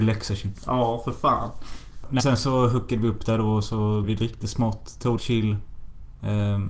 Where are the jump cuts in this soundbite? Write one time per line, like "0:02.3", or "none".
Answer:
0:02.2
0:04.0
0:04.4
0:05.2